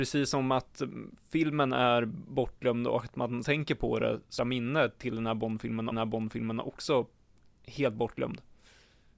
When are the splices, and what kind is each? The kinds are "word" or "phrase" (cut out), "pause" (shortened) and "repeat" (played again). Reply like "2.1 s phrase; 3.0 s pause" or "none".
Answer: 3.4 s word; 4.4 s phrase; 5.9 s repeat